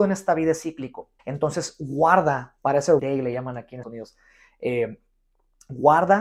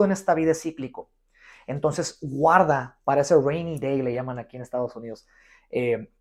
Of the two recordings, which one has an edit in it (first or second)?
first